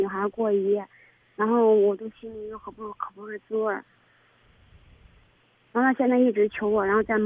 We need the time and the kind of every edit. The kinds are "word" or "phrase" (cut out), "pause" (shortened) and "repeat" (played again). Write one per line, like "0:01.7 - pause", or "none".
none

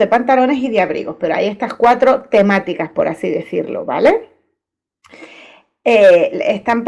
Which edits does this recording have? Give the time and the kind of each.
none

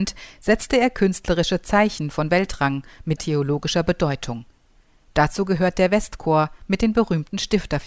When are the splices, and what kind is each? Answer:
0:03.2 - word

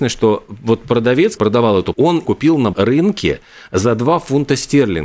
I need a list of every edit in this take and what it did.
0:01.4 - word
0:01.9 - word
0:02.2 - word
0:02.7 - word

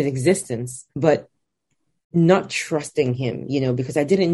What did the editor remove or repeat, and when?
0:00.9 - pause

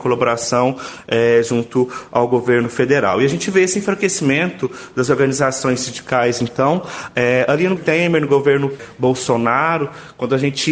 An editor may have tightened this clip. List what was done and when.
0:07.8 - word

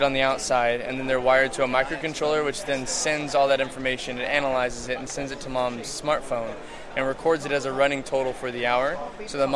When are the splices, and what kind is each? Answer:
none

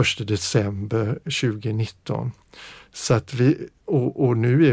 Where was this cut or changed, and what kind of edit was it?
none

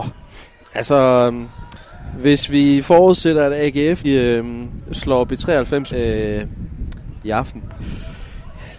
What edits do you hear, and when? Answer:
0:04.0 - word
0:05.9 - word
0:07.2 - word

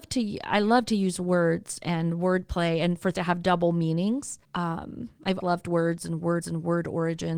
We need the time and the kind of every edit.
0:03.1 - word
0:04.4 - pause
0:05.4 - word
0:06.4 - repeat

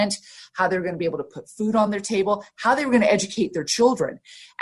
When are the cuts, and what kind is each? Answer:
none

